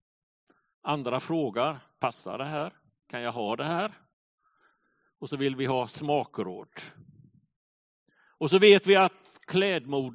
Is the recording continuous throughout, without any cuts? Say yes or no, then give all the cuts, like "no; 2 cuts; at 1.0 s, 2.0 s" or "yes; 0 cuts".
yes; 0 cuts